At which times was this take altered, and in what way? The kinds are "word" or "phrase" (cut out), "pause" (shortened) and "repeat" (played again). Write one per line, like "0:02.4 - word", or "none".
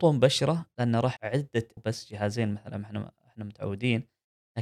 0:01.2 - word
0:01.8 - phrase